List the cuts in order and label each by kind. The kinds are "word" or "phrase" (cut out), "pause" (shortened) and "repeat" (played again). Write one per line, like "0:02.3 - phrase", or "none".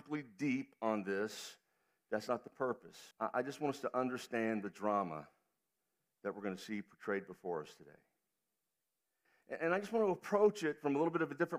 0:03.1 - pause